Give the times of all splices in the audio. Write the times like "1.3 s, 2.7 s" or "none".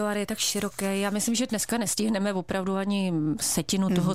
none

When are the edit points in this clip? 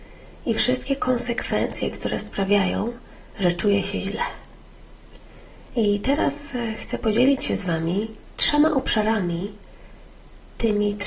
none

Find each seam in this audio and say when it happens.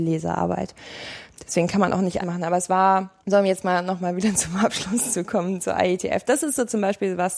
2.2 s, 3.2 s

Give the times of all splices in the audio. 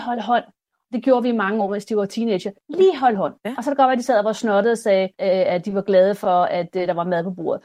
3.4 s, 5.1 s

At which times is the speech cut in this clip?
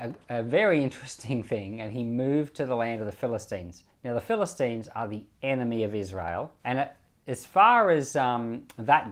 3.9 s, 6.6 s

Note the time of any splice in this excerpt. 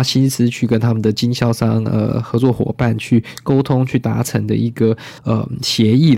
5.2 s

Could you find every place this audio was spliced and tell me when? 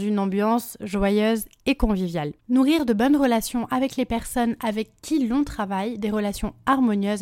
2.4 s

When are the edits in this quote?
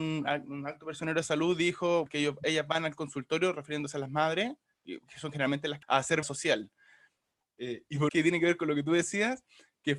2.1 s, 5.1 s, 5.8 s, 6.2 s, 8.1 s

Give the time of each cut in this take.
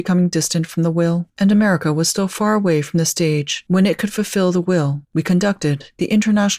5.0 s

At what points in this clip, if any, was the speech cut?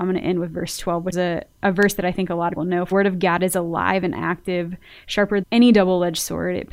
1.1 s, 2.6 s, 2.9 s, 5.4 s

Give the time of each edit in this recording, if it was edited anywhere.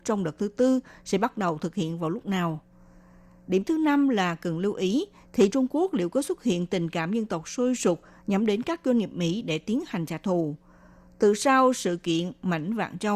5.5 s

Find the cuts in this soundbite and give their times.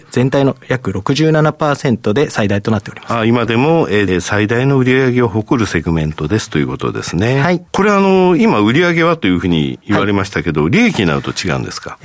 4.1 s

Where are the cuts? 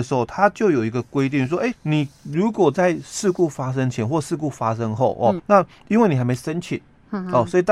1.7 s, 5.4 s

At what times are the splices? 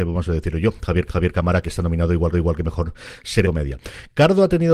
1.1 s, 1.6 s, 2.3 s, 3.4 s

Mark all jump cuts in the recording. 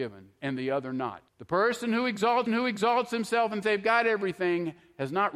1.3 s, 2.5 s, 3.6 s

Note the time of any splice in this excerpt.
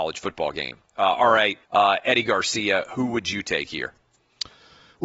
1.6 s

